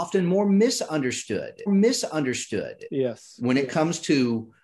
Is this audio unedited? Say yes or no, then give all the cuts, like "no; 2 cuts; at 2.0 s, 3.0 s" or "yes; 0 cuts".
no; 1 cut; at 1.7 s